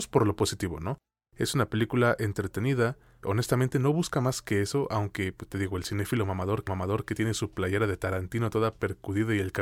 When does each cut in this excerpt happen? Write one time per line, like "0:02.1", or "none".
0:03.2
0:06.7